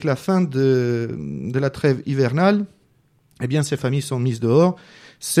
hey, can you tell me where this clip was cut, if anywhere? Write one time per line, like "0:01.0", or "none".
none